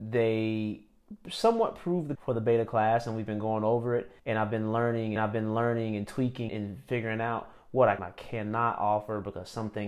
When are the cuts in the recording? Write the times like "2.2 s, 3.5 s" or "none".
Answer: 2.2 s, 4.2 s, 5.2 s, 6.5 s, 8.0 s